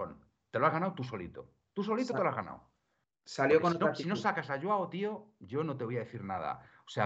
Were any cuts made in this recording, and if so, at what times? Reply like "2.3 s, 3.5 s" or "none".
none